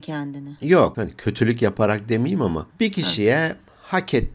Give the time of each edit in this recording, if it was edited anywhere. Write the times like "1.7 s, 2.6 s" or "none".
2.7 s